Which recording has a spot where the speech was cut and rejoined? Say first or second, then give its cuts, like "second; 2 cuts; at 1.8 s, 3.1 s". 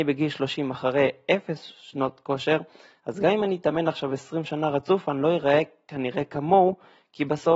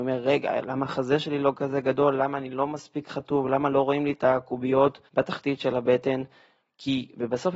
second; 1 cut; at 5.1 s